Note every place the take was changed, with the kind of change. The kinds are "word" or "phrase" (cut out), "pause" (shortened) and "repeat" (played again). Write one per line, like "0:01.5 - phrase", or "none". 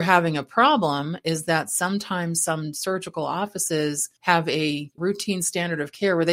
0:04.2 - pause
0:05.0 - word